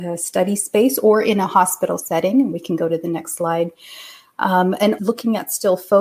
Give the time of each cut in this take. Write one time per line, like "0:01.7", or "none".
0:05.0